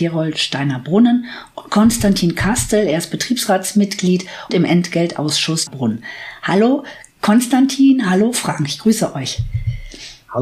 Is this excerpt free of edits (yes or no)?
no